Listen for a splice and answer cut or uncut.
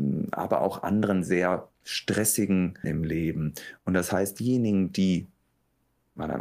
cut